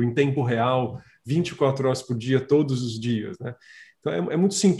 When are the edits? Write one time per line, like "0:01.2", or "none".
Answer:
none